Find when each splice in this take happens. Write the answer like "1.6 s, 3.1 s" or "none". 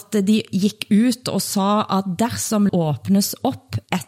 2.7 s